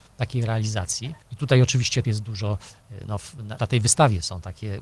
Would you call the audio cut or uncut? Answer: cut